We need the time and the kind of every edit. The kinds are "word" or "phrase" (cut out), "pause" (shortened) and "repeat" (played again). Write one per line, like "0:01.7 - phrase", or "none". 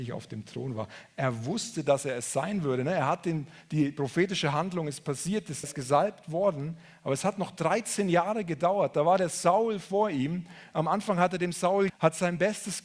0:05.6 - word
0:11.9 - word